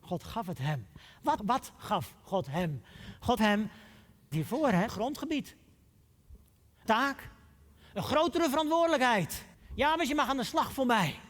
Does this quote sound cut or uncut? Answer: cut